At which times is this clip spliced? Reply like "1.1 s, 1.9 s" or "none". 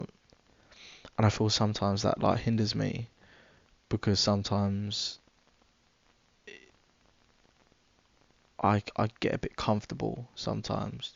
none